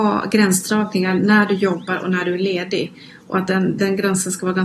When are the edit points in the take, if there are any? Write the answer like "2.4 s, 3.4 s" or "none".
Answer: none

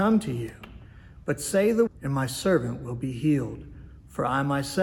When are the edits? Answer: 1.9 s

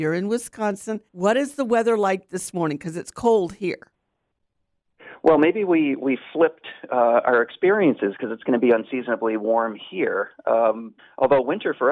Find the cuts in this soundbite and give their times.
1.1 s, 11.0 s

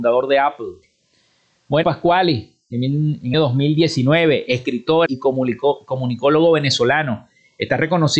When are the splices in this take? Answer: 1.8 s, 3.3 s, 5.1 s

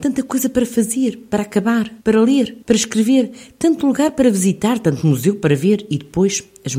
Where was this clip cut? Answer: 2.0 s, 2.6 s

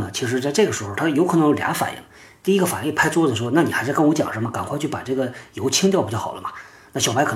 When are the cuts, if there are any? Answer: none

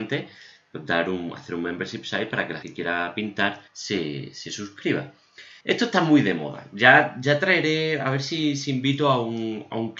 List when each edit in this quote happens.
2.6 s, 3.7 s, 5.6 s

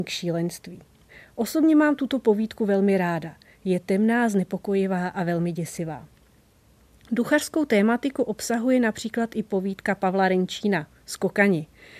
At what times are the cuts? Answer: none

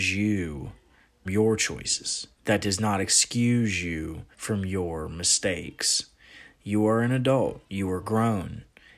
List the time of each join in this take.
1.3 s, 2.3 s, 4.3 s, 7.7 s

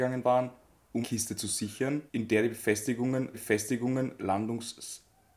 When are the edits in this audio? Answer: 1.0 s, 2.1 s, 3.3 s

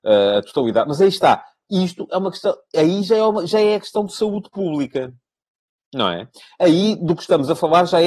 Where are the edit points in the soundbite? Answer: none

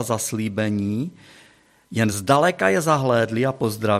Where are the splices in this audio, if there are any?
none

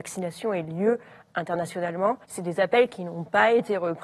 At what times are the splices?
2.2 s

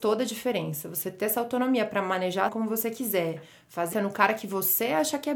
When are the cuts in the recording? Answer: 2.5 s, 3.9 s

